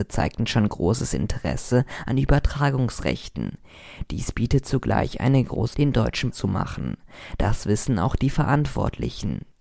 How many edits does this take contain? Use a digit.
2